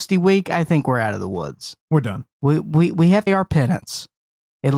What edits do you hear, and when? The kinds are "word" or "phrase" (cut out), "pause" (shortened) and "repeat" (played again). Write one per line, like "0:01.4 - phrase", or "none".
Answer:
0:01.8 - pause
0:03.3 - phrase